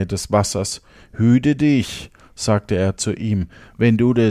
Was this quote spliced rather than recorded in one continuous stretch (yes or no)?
no